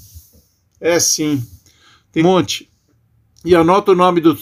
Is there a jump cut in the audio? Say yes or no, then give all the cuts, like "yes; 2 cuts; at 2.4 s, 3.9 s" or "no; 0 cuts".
yes; 1 cut; at 2.2 s